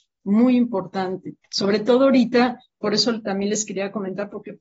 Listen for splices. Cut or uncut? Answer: cut